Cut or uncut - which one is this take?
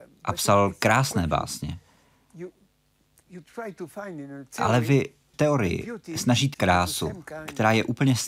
cut